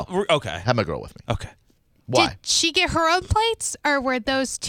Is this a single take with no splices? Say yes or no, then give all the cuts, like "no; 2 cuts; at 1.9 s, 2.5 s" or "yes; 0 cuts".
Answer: yes; 0 cuts